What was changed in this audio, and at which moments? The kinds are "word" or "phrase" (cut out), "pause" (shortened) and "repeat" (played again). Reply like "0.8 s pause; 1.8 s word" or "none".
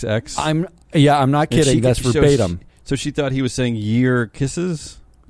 none